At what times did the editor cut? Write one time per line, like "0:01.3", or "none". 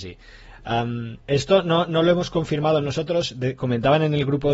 0:01.2